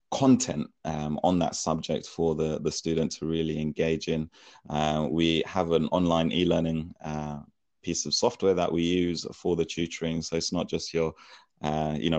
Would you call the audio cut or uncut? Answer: uncut